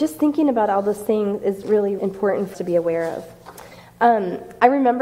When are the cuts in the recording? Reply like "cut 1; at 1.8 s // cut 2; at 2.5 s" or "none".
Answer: cut 1; at 1.6 s // cut 2; at 2.0 s // cut 3; at 2.5 s